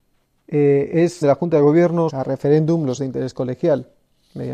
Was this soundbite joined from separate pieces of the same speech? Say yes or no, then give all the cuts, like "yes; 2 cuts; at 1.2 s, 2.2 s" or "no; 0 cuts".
yes; 3 cuts; at 1.2 s, 2.1 s, 3.0 s